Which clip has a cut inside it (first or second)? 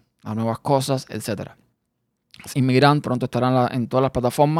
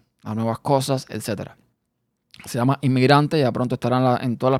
first